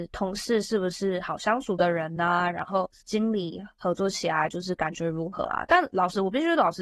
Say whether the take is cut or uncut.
uncut